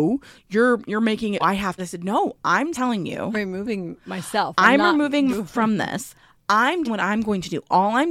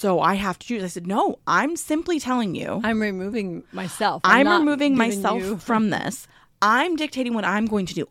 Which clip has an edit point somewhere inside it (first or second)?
first